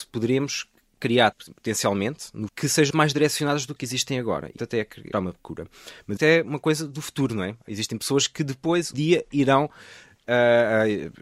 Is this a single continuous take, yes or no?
no